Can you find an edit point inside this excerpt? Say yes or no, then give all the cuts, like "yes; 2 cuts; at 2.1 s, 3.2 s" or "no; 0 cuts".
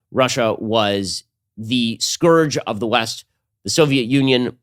no; 0 cuts